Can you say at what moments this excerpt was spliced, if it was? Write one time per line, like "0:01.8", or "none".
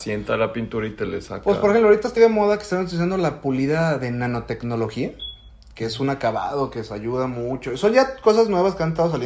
0:02.2